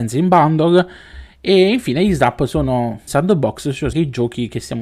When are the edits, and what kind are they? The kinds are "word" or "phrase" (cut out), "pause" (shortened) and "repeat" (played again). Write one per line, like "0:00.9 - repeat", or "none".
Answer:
0:03.1 - word
0:03.9 - word

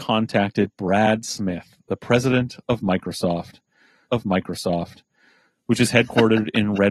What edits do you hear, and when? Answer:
0:04.1 - repeat

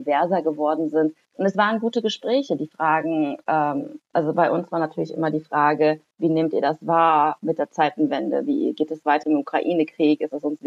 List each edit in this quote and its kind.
0:01.2 - pause
0:06.1 - pause
0:09.2 - phrase

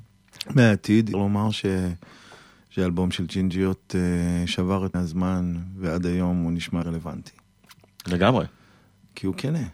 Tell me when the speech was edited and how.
0:01.1 - word
0:04.9 - word
0:06.8 - word

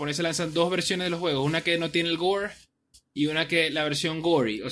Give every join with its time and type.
none

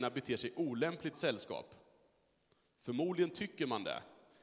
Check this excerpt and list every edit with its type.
0:01.1 - phrase

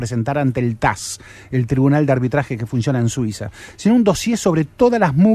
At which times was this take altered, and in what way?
none

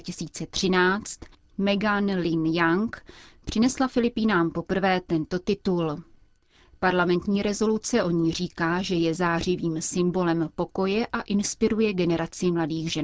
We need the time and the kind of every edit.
none

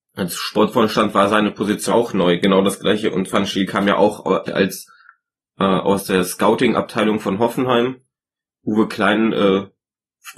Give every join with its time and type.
0:01.9 - word
0:03.3 - word
0:04.5 - word

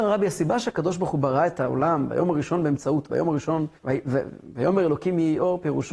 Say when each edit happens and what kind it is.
0:03.1 - word
0:03.8 - pause

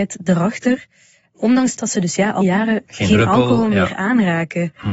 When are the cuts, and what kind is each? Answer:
0:01.8 - word
0:02.4 - word
0:02.9 - word

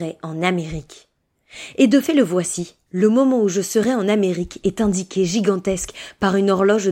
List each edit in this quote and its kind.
0:02.9 - pause

